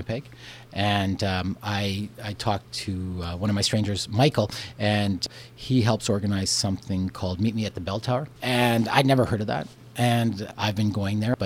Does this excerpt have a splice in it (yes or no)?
no